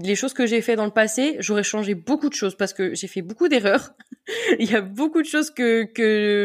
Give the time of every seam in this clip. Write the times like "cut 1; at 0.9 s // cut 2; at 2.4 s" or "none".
none